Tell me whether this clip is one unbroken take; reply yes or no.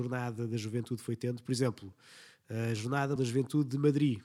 no